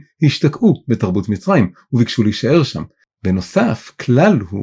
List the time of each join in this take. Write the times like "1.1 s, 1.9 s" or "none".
none